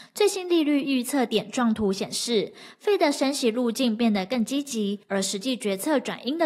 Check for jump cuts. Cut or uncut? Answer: cut